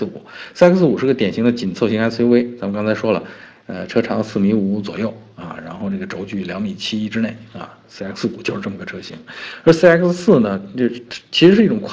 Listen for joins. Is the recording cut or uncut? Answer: uncut